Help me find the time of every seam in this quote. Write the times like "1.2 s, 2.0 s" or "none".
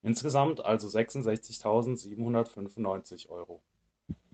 none